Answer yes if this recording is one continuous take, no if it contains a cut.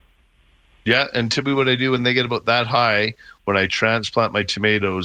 yes